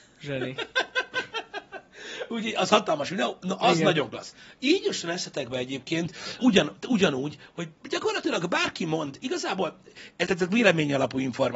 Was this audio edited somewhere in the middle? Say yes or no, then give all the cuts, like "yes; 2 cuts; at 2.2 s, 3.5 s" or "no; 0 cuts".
yes; 3 cuts; at 6.4 s, 7.8 s, 10.3 s